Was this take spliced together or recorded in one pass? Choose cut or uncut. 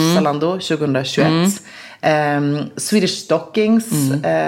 uncut